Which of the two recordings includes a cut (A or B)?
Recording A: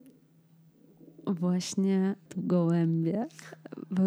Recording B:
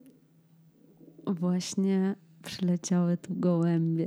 A